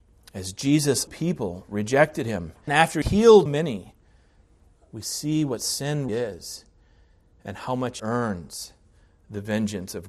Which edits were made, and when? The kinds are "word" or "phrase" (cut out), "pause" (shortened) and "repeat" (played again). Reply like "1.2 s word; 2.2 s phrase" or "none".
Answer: 1.1 s word; 2.7 s word; 3.0 s word; 3.5 s word; 6.1 s word; 8.0 s word